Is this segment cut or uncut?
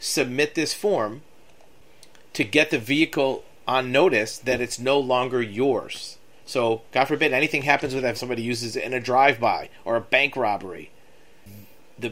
cut